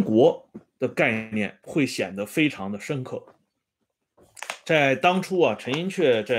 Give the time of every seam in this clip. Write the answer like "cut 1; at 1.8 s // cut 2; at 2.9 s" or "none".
cut 1; at 1.6 s